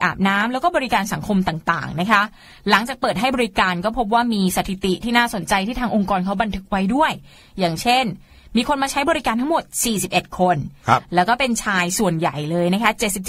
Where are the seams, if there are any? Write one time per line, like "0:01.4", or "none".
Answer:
none